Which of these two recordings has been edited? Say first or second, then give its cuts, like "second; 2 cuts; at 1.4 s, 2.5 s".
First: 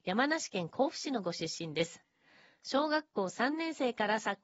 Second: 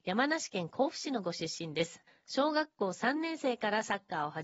second; 1 cut; at 2.1 s